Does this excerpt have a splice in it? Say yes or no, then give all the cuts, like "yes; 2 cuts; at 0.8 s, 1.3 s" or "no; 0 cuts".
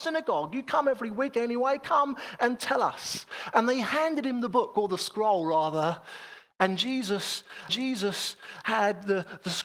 yes; 1 cut; at 7.7 s